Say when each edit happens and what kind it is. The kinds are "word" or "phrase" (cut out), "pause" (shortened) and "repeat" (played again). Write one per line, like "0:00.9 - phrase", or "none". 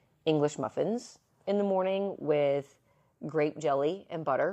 none